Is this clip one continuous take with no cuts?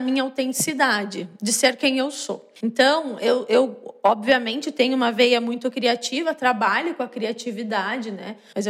no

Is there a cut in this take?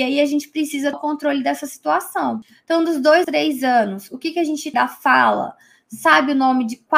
yes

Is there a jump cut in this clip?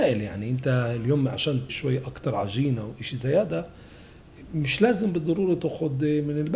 yes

